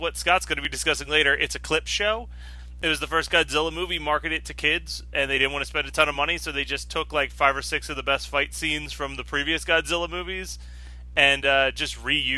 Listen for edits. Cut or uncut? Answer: uncut